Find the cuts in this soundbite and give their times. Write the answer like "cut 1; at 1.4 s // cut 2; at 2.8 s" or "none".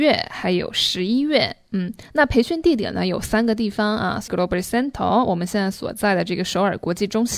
cut 1; at 4.3 s